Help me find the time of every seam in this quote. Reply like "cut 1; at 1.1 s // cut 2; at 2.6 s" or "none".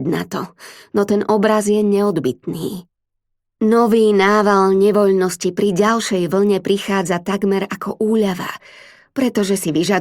none